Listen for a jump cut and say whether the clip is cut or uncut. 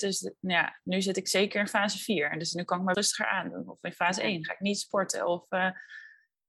cut